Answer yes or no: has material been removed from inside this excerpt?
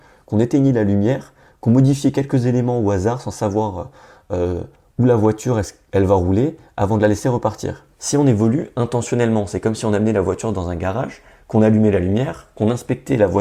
yes